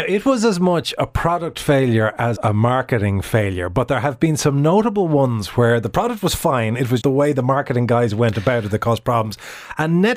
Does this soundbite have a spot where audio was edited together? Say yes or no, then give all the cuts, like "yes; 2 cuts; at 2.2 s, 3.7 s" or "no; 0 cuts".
yes; 2 cuts; at 2.4 s, 7.0 s